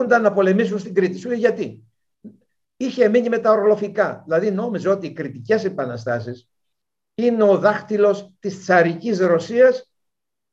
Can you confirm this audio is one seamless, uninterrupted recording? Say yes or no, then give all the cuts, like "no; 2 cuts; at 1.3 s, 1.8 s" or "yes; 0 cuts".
yes; 0 cuts